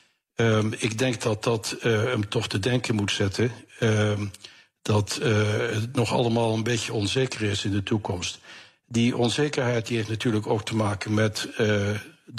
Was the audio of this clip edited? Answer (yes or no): no